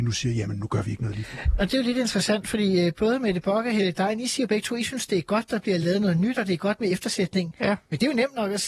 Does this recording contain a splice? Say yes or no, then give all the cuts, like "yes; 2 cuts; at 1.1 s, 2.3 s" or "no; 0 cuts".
no; 0 cuts